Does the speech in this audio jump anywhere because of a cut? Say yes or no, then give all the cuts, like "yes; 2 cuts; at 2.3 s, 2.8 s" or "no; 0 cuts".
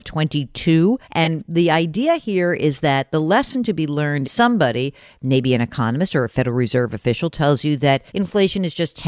yes; 3 cuts; at 1.0 s, 4.2 s, 8.1 s